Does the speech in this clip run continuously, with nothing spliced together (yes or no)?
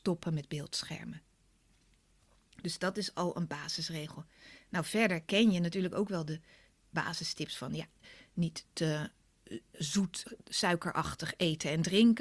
yes